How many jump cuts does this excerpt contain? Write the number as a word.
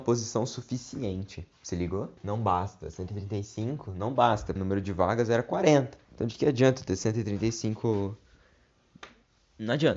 three